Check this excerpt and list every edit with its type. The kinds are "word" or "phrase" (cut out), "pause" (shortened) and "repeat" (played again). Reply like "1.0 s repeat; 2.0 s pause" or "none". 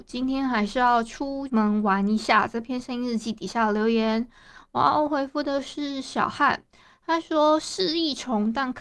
none